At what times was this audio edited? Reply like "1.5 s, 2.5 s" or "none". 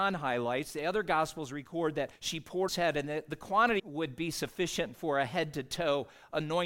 2.2 s, 2.7 s, 3.8 s